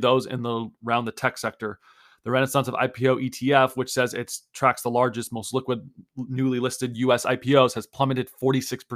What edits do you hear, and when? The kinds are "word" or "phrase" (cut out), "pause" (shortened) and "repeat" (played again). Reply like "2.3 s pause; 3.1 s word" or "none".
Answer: none